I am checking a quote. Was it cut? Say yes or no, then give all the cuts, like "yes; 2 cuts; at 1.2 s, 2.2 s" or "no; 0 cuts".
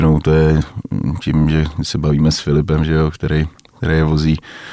no; 0 cuts